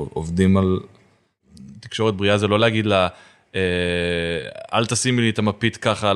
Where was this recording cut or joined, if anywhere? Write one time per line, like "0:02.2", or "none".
none